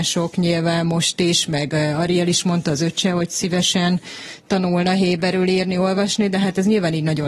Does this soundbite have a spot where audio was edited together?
no; 0 cuts

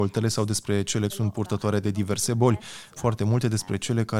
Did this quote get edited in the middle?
yes; 2 cuts; at 1.1 s, 3.0 s

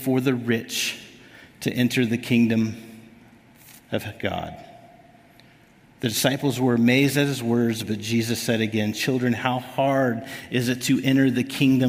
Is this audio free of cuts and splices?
yes; 0 cuts

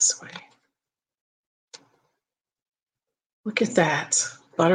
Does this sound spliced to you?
no; 0 cuts

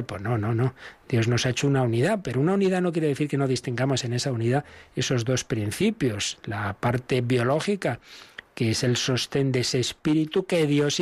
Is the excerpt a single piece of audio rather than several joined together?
yes; 0 cuts

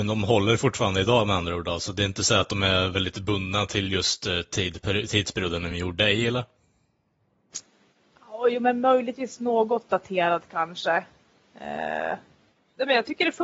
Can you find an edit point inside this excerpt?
no; 0 cuts

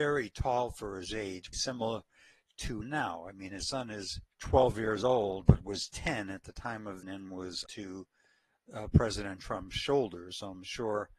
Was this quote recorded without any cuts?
no; 6 cuts; at 1.5 s, 2.8 s, 4.3 s, 5.4 s, 7.0 s, 7.7 s

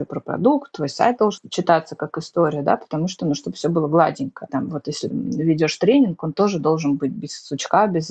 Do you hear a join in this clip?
yes; 1 cut; at 5.1 s

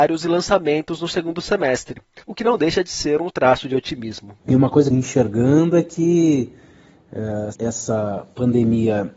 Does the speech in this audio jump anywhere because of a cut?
yes; 5 cuts; at 2.2 s, 3.3 s, 4.4 s, 4.9 s, 7.5 s

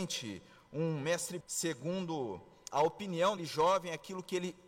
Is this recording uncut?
no; 3 cuts; at 1.4 s, 2.7 s, 3.4 s

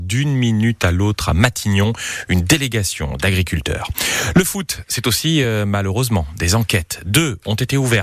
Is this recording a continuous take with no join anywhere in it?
yes; 0 cuts

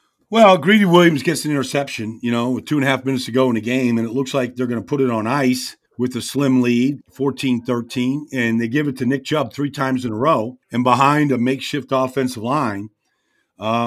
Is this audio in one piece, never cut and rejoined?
no; 3 cuts; at 5.9 s, 7.0 s, 10.6 s

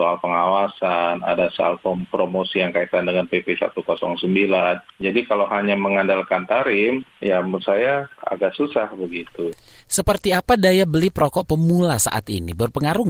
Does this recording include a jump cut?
no; 0 cuts

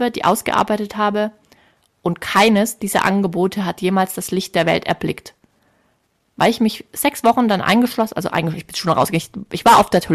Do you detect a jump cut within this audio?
no; 0 cuts

